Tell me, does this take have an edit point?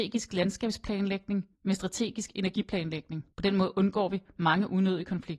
yes; 2 cuts; at 1.5 s, 3.3 s

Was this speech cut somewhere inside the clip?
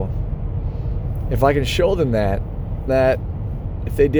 yes; 1 cut; at 2.9 s

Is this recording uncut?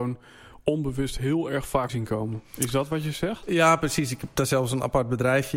no; 1 cut; at 1.9 s

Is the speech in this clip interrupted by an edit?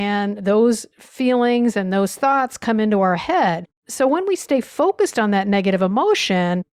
yes; 1 cut; at 3.8 s

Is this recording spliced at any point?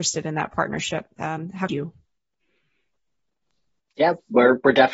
yes; 1 cut; at 1.7 s

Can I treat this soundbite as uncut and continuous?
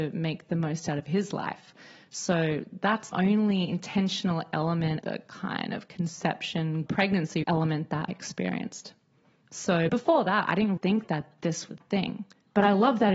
no; 8 cuts; at 3.1 s, 5.0 s, 6.9 s, 7.4 s, 8.1 s, 9.9 s, 10.8 s, 11.7 s

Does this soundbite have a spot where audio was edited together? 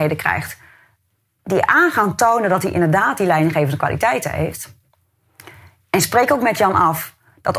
no; 0 cuts

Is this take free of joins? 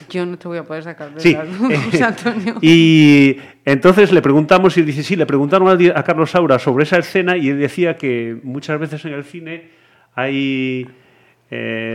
yes; 0 cuts

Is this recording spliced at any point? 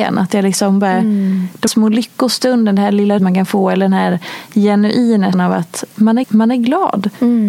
yes; 4 cuts; at 1.7 s, 3.2 s, 5.3 s, 6.2 s

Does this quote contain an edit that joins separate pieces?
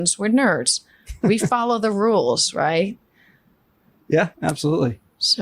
yes; 1 cut; at 4.3 s

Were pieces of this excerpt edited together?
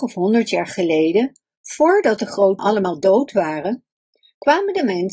yes; 1 cut; at 2.6 s

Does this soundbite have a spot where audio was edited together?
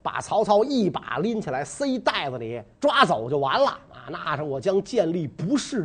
yes; 1 cut; at 2.7 s

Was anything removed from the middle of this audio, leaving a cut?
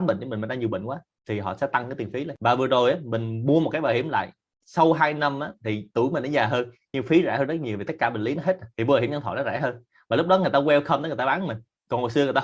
no; 0 cuts

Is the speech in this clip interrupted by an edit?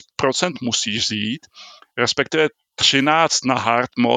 no; 0 cuts

